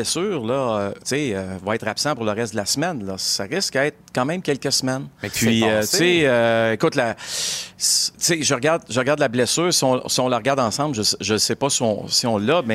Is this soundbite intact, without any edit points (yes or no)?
no